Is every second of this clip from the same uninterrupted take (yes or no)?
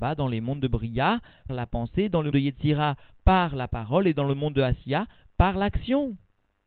no